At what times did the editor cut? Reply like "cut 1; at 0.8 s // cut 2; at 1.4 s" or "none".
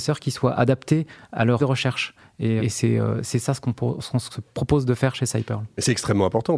cut 1; at 1.6 s // cut 2; at 2.6 s

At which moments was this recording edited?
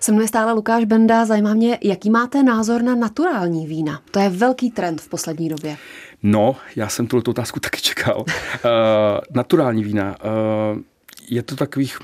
cut 1; at 4.1 s

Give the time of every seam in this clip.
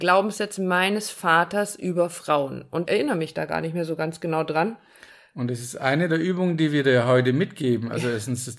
cut 1; at 2.9 s

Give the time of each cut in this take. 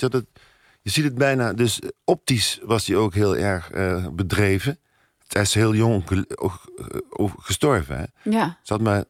cut 1; at 5.2 s

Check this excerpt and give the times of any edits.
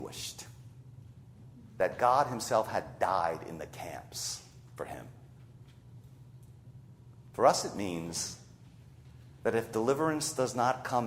none

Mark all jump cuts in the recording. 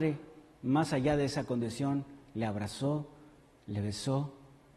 none

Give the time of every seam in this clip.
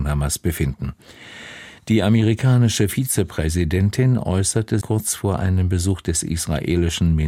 cut 1; at 4.8 s

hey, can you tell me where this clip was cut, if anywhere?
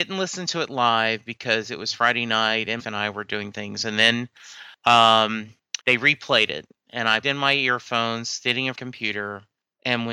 cut 1; at 2.8 s // cut 2; at 5.8 s // cut 3; at 7.2 s // cut 4; at 8.7 s

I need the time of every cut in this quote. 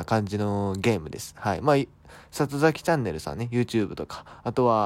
none

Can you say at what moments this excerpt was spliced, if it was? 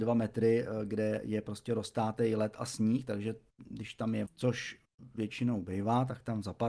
cut 1; at 4.3 s

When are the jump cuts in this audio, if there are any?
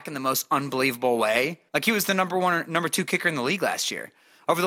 cut 1; at 1.7 s

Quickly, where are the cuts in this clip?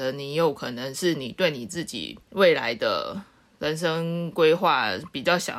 cut 1; at 2.2 s

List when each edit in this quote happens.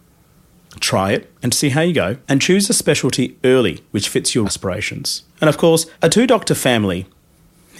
cut 1; at 1.4 s // cut 2; at 2.2 s // cut 3; at 3.9 s // cut 4; at 4.4 s // cut 5; at 5.3 s // cut 6; at 5.9 s

